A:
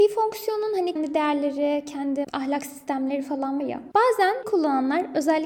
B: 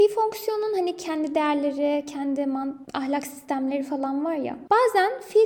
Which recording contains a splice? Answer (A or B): A